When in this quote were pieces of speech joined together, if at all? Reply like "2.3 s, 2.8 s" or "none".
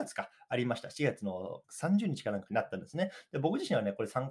1.6 s